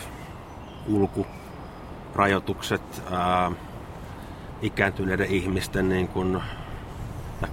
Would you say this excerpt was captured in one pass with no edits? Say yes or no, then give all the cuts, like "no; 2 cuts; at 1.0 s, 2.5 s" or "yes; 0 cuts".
yes; 0 cuts